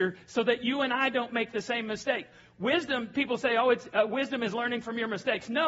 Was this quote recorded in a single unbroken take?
yes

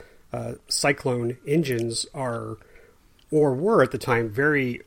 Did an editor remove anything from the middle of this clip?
no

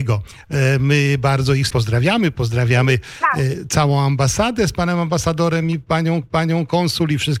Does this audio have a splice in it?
yes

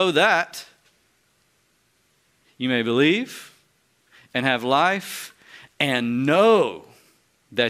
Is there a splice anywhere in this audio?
no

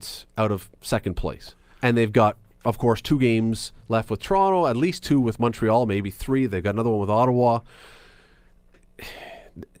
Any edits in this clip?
no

